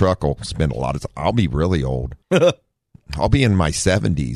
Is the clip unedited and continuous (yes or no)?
no